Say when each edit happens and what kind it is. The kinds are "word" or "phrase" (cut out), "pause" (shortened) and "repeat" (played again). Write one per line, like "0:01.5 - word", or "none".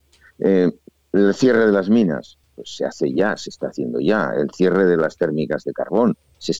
0:02.4 - pause